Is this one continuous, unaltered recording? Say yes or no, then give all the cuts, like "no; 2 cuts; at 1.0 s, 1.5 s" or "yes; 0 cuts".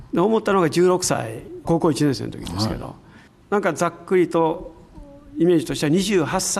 yes; 0 cuts